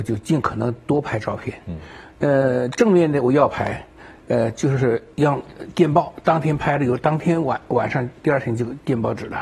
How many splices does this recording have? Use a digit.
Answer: 0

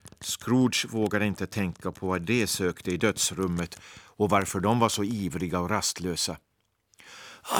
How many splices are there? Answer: 0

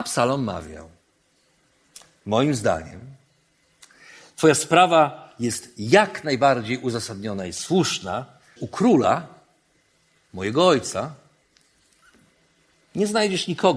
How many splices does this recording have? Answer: 1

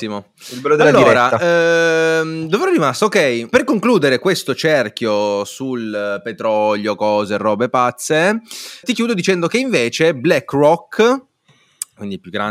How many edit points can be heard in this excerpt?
2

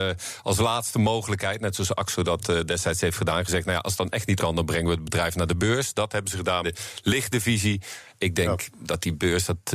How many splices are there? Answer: 2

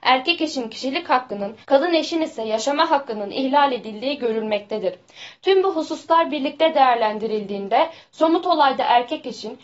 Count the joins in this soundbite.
1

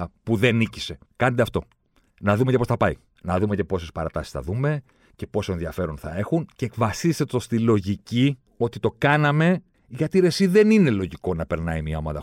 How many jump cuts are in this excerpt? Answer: 2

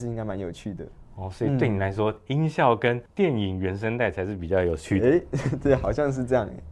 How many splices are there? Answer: 1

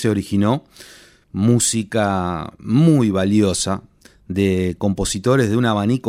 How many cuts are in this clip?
0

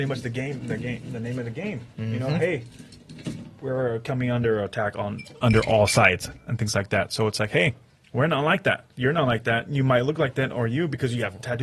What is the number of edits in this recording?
1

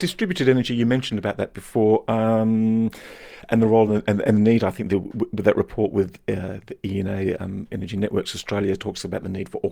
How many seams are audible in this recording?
0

